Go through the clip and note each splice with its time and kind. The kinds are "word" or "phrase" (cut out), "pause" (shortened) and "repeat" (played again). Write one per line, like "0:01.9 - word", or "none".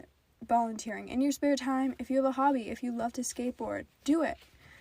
none

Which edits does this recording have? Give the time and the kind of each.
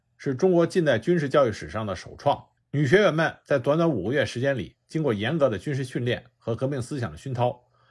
0:02.6 - pause

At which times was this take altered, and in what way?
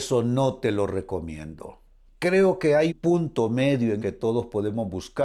0:02.1 - pause
0:02.9 - word
0:04.0 - word

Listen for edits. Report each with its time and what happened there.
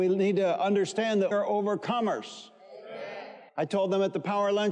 0:01.3 - word
0:03.5 - pause

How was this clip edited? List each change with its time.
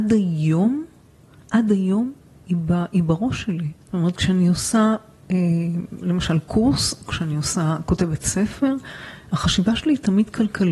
0:03.8 - pause

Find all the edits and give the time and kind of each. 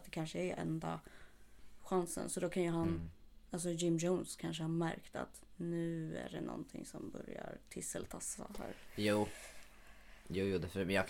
none

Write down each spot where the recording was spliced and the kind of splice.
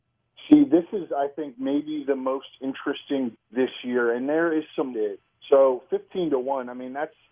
0:03.4 - word
0:04.9 - phrase
0:05.3 - pause

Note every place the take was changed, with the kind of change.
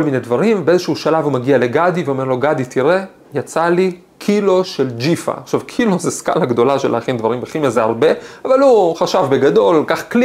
none

